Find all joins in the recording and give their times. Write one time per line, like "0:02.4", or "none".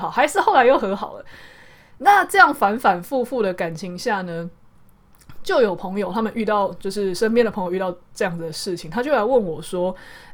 none